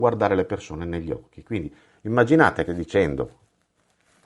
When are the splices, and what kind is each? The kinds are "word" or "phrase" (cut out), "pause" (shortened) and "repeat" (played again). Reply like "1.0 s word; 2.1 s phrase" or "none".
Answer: 2.7 s phrase